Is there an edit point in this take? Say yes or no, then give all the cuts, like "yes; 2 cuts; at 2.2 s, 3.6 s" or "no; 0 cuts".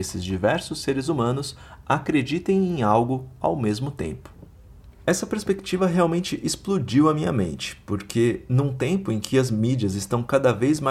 no; 0 cuts